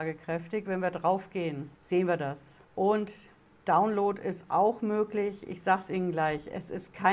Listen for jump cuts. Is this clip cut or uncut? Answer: cut